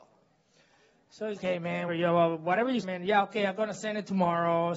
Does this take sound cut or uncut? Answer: cut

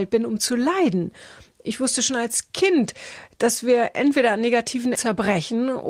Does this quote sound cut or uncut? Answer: cut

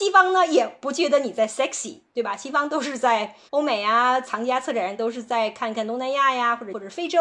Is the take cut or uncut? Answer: cut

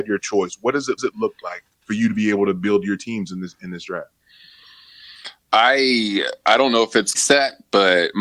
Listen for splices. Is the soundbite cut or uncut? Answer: cut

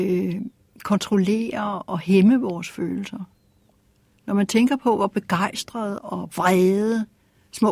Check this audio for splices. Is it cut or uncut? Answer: cut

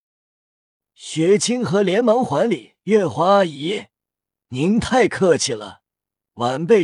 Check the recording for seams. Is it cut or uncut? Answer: uncut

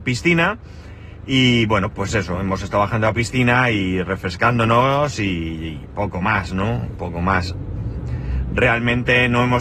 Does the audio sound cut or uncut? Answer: uncut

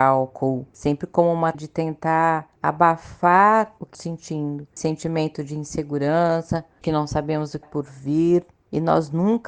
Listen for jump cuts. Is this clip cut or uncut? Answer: cut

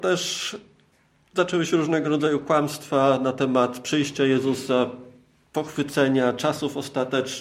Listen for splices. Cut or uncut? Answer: uncut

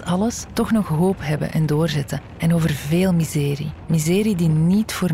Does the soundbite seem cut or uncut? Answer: uncut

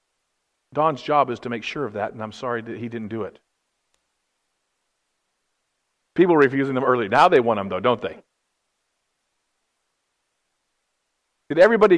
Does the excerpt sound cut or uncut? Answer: uncut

